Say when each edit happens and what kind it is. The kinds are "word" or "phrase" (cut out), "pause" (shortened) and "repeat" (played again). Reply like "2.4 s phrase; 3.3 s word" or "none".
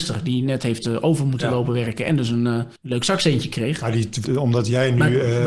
2.8 s pause; 4.2 s word